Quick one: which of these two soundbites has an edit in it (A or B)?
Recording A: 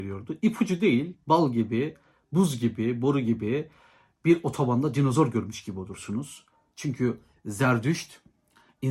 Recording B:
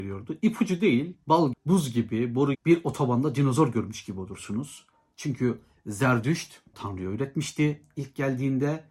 B